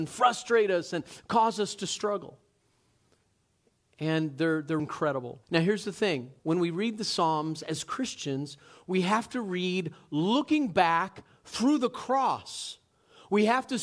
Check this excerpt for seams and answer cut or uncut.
cut